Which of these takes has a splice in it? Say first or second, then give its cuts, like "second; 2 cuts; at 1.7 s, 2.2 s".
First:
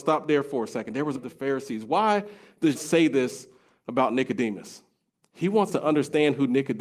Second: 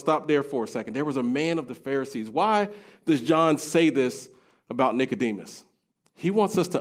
first; 3 cuts; at 1.1 s, 2.7 s, 5.7 s